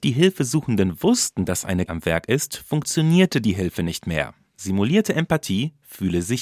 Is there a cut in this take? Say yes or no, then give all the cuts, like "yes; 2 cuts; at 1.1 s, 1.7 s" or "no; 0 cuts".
yes; 1 cut; at 1.9 s